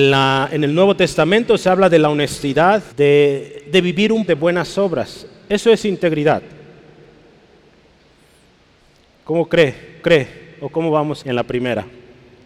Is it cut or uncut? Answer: cut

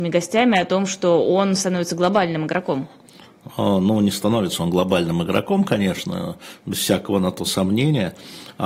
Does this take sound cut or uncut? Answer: uncut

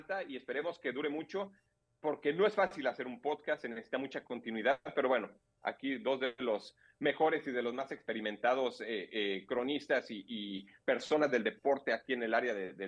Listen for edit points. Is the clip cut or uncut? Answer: uncut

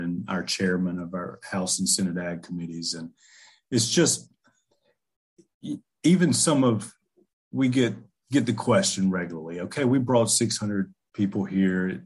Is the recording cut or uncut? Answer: uncut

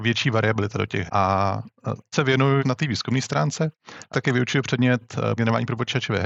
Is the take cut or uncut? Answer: cut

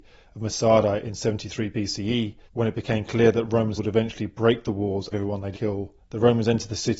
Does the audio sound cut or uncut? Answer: cut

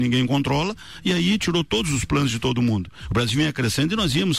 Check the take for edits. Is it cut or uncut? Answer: uncut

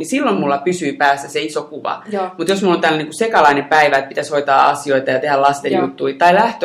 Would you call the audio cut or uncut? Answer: uncut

